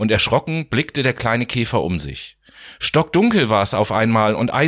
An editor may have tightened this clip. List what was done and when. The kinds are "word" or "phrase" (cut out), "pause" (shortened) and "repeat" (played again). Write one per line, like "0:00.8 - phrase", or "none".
none